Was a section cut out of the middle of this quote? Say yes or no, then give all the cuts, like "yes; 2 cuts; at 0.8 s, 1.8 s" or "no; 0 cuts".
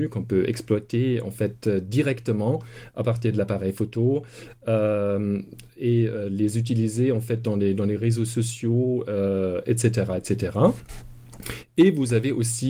no; 0 cuts